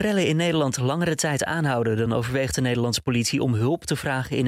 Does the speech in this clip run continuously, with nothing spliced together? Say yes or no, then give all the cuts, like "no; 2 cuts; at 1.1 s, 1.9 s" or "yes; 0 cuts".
yes; 0 cuts